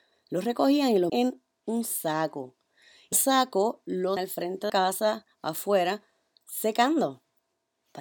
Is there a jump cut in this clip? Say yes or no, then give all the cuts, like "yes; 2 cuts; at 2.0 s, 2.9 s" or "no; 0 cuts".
yes; 4 cuts; at 1.1 s, 3.1 s, 4.2 s, 4.7 s